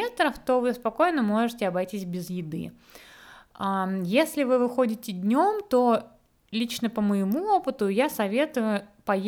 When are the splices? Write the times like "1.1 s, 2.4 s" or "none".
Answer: none